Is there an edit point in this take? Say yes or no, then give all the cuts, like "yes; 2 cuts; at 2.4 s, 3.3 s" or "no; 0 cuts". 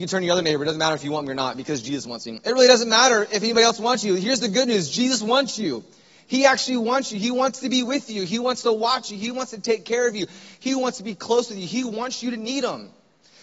no; 0 cuts